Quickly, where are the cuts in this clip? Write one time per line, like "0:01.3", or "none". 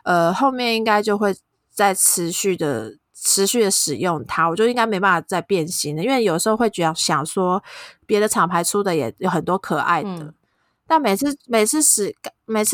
0:11.4